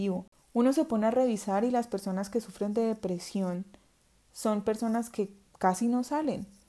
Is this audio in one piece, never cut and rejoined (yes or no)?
yes